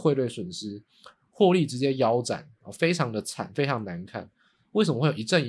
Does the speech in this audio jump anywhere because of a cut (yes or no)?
no